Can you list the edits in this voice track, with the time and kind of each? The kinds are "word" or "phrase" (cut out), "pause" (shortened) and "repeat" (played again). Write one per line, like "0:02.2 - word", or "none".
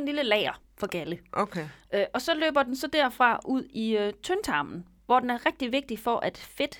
none